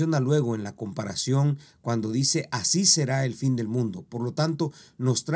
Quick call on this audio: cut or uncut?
uncut